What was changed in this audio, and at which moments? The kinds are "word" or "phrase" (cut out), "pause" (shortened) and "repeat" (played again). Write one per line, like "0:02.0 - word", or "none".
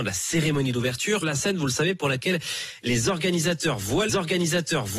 0:01.2 - word
0:04.1 - repeat